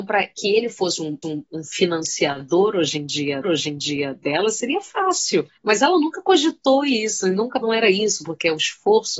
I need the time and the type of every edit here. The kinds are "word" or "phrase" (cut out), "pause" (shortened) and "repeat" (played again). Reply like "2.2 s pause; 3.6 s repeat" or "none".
1.2 s repeat; 3.4 s repeat; 5.6 s pause; 7.6 s phrase